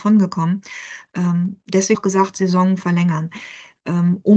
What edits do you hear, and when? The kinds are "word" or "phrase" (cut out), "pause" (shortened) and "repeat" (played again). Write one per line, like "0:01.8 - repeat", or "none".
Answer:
0:01.9 - phrase